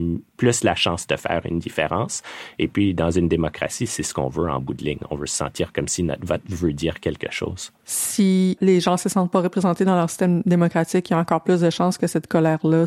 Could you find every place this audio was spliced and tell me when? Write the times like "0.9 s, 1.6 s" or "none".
7.8 s